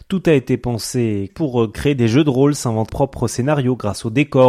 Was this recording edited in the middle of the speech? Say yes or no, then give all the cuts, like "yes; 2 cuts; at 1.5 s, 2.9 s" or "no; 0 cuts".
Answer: yes; 2 cuts; at 1.3 s, 2.9 s